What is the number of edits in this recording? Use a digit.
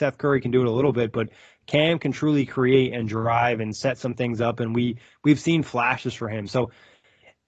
0